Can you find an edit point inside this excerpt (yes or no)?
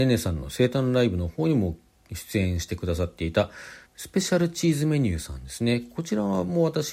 yes